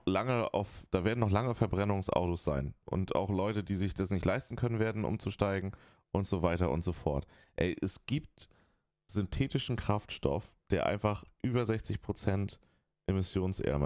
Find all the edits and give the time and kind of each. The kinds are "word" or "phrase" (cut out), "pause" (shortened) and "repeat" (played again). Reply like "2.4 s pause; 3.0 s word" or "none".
none

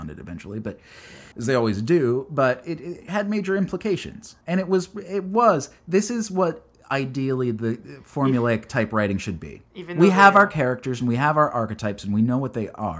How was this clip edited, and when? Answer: 1.3 s pause; 4.4 s pause

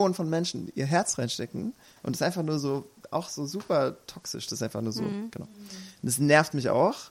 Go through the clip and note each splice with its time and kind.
none

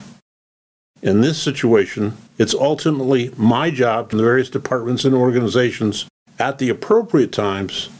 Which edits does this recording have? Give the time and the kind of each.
2.3 s pause; 4.1 s phrase; 6.2 s pause

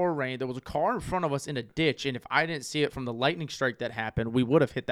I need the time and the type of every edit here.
none

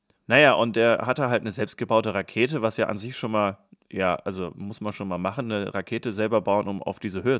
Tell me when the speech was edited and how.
none

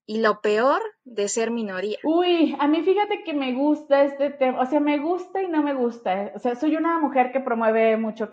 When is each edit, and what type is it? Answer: none

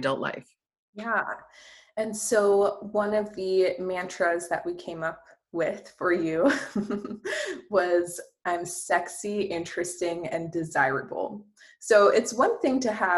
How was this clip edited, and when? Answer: none

